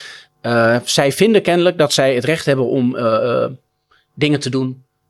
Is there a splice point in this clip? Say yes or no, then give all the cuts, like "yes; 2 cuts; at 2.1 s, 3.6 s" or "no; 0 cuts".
no; 0 cuts